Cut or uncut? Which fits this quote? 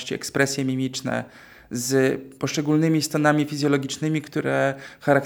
uncut